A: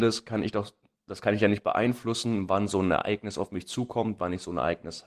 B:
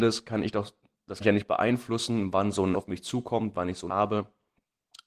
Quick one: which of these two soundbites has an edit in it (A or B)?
B